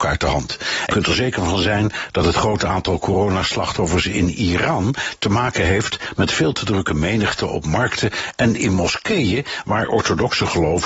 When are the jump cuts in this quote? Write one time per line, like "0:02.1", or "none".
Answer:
0:00.9